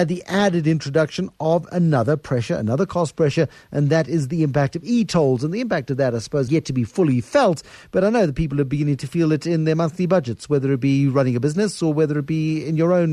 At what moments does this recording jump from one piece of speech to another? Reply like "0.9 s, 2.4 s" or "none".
6.5 s